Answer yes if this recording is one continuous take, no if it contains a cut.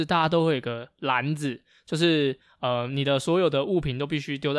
yes